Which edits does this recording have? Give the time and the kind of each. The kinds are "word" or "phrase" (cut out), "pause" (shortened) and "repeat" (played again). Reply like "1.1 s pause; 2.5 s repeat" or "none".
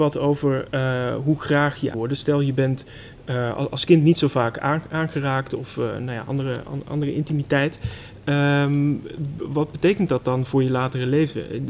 1.9 s phrase

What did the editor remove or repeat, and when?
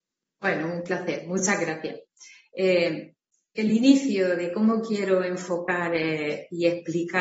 none

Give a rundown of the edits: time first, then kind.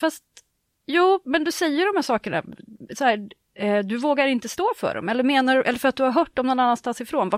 none

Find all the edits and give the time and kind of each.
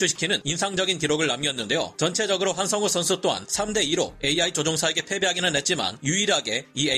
none

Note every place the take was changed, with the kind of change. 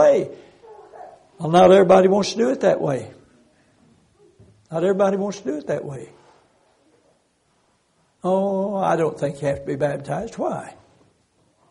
none

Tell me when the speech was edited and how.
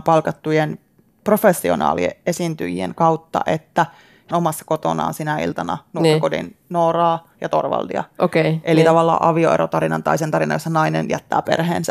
4.3 s phrase

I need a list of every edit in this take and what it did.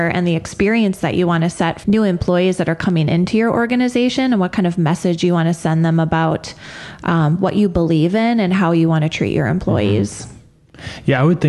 1.8 s word

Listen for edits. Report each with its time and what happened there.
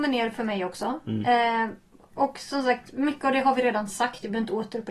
none

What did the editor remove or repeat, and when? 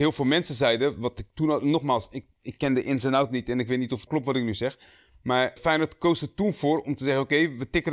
4.1 s word; 5.6 s word

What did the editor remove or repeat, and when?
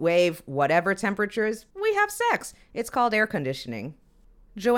1.7 s pause

